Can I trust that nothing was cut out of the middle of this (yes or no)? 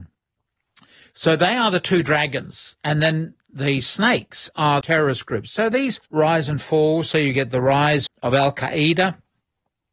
no